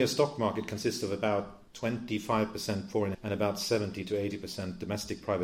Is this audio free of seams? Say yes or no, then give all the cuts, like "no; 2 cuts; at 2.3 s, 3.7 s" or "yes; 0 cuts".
no; 2 cuts; at 1.7 s, 3.1 s